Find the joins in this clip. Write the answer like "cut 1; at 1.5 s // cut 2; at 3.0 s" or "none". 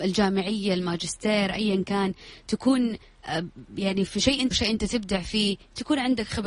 cut 1; at 4.5 s